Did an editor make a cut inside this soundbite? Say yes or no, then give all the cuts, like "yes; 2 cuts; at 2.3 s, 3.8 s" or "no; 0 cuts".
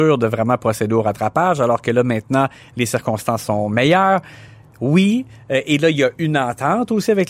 no; 0 cuts